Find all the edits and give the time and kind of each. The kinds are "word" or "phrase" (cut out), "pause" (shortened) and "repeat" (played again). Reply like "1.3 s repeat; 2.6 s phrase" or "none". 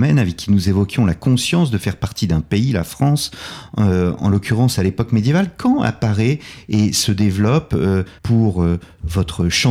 8.2 s pause